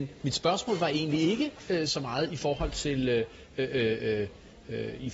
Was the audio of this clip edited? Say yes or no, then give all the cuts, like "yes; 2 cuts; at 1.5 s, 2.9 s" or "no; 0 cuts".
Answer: no; 0 cuts